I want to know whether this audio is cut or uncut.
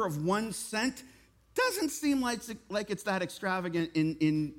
uncut